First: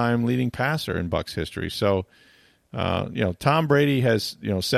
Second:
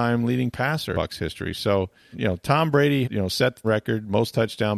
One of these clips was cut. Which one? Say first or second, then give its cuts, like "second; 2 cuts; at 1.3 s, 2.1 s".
second; 4 cuts; at 0.9 s, 2.1 s, 3.0 s, 3.6 s